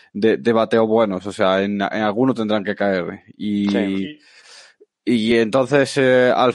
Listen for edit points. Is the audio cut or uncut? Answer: uncut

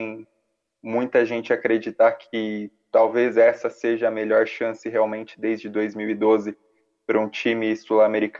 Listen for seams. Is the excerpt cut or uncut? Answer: uncut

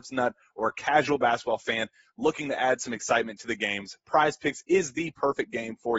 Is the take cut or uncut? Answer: uncut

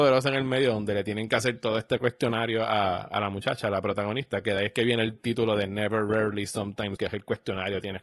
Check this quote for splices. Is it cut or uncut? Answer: cut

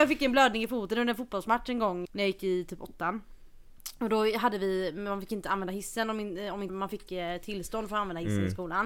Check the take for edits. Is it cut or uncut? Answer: cut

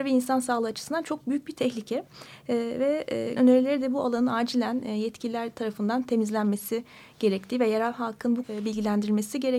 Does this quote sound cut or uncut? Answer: cut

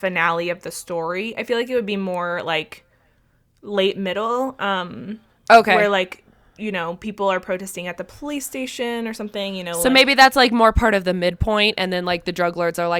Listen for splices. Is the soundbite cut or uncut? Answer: uncut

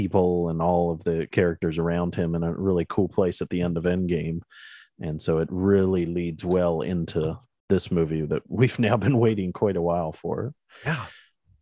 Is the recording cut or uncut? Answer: uncut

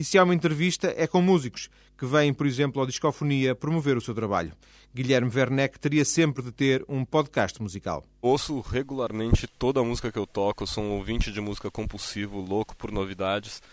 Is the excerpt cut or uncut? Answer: uncut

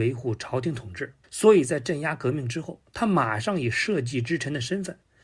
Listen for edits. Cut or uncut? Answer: cut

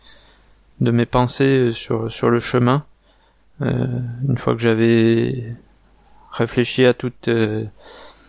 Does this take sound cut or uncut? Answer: uncut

